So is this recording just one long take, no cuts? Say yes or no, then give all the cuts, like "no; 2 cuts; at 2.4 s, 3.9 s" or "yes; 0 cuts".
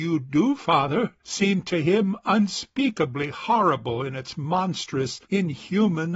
no; 2 cuts; at 1.2 s, 5.2 s